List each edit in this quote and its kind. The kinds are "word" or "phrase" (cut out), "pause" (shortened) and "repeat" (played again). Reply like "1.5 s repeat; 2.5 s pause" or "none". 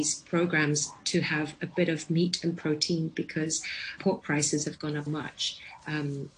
4.0 s word; 5.1 s word